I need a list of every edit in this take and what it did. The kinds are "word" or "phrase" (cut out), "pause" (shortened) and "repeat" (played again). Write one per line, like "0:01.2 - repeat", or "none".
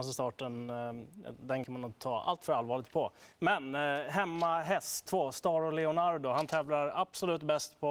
0:01.6 - word
0:03.3 - pause
0:05.1 - word